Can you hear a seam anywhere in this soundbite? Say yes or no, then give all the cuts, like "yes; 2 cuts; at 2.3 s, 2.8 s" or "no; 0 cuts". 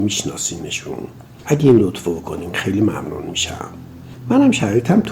no; 0 cuts